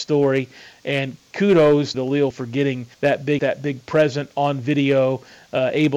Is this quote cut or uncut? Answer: cut